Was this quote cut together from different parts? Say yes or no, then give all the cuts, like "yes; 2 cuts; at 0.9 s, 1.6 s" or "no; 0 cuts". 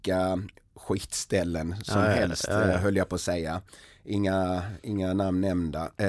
no; 0 cuts